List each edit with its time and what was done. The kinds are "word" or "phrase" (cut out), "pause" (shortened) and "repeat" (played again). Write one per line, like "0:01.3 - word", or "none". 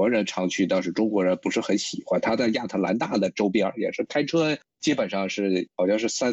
none